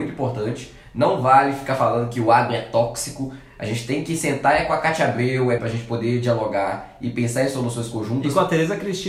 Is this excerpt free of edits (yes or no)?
no